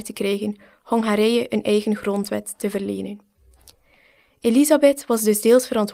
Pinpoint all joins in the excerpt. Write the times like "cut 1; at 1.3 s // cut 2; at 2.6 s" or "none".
none